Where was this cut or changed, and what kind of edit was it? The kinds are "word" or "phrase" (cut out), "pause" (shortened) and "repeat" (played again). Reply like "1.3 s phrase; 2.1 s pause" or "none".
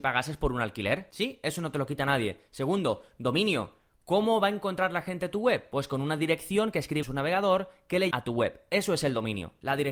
7.0 s word; 8.1 s word